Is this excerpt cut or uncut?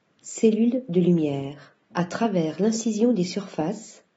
cut